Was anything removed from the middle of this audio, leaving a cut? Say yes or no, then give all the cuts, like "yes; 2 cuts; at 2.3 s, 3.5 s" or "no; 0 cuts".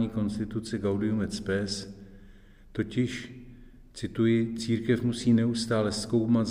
no; 0 cuts